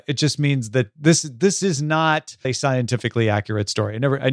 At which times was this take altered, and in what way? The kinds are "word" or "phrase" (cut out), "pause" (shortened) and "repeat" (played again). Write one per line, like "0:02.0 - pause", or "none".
0:02.4 - phrase